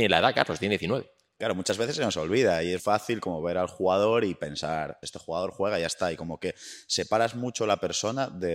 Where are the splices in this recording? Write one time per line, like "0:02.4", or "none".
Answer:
0:02.8
0:05.0

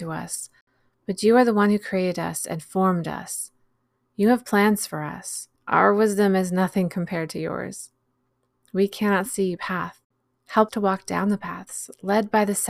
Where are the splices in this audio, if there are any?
0:05.6
0:09.6
0:10.7

